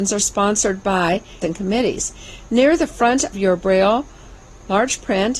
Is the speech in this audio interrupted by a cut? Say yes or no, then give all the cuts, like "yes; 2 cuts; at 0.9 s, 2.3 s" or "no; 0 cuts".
yes; 2 cuts; at 1.4 s, 3.3 s